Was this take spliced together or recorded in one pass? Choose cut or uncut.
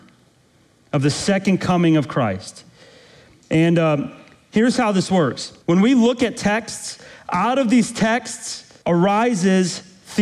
cut